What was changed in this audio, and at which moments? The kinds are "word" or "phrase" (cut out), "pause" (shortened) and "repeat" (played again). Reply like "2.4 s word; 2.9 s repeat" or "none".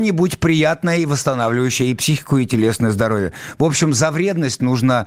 none